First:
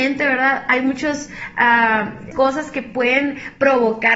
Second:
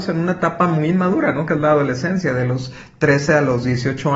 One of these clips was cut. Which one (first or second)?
first